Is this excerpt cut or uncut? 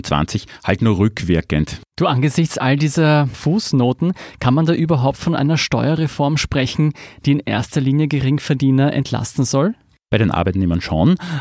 uncut